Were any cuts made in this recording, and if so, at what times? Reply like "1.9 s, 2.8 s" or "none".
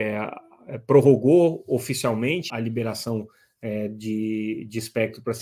2.5 s

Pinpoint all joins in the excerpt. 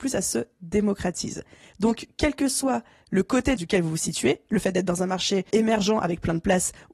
3.6 s, 5.5 s

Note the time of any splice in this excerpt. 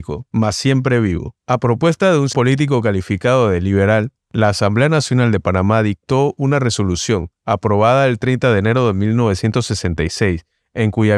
1.4 s, 2.3 s

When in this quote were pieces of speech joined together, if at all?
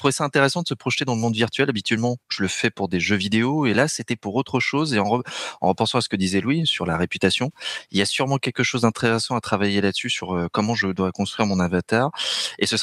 2.2 s

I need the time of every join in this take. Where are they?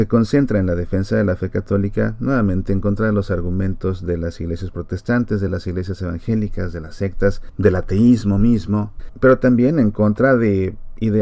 none

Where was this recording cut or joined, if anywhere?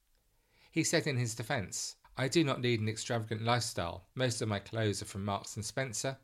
2.0 s, 4.1 s

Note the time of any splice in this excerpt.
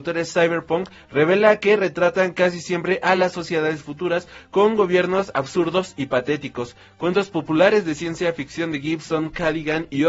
none

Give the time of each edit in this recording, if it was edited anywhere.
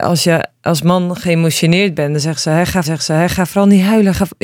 2.8 s

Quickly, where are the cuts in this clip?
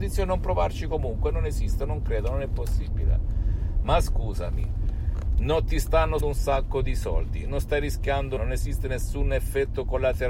6.2 s, 8.4 s

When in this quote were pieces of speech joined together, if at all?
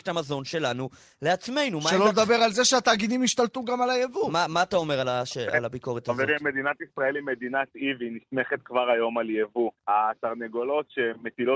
9.8 s

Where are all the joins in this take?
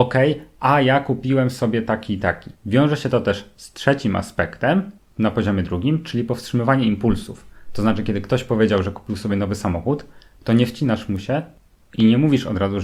2.6 s, 5.0 s

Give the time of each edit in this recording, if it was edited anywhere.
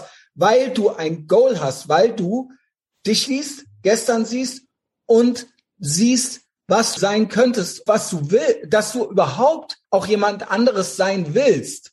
3.3 s, 7.0 s, 7.9 s, 9.8 s

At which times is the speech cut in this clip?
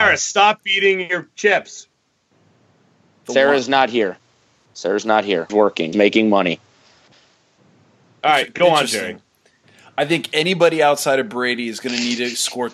5.5 s, 5.9 s

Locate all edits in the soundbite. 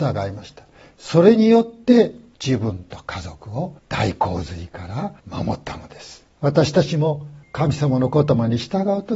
3.8 s, 5.2 s, 6.3 s, 7.4 s

